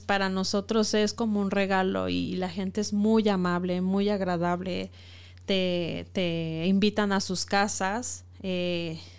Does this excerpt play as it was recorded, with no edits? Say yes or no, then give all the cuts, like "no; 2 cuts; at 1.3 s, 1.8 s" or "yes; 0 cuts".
yes; 0 cuts